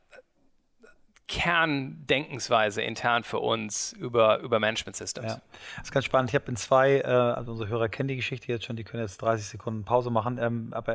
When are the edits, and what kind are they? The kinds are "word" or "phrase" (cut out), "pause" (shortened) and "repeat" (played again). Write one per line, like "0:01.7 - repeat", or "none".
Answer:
none